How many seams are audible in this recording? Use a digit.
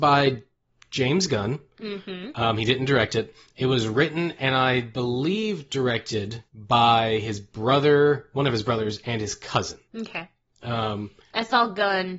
2